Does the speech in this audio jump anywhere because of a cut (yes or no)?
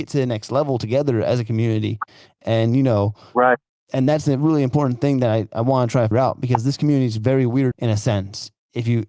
yes